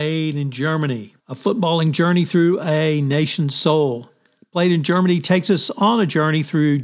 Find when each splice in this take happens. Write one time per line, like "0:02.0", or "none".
0:01.2
0:04.3